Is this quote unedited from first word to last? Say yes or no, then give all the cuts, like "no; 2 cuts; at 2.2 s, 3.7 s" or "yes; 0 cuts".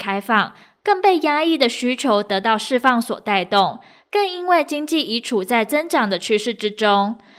yes; 0 cuts